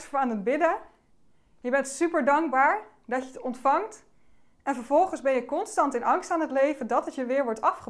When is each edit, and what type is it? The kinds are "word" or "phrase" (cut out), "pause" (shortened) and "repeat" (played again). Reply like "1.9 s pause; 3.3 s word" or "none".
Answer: none